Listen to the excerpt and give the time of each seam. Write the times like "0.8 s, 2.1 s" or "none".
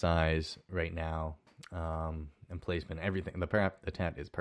none

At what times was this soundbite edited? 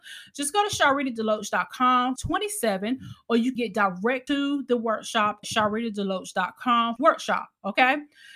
2.2 s, 3.6 s, 4.3 s, 5.4 s, 7.0 s

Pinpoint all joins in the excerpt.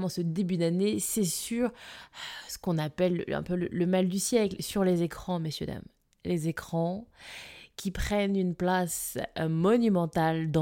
none

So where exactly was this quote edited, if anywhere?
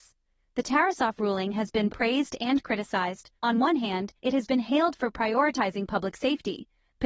1.9 s, 3.4 s, 4.2 s

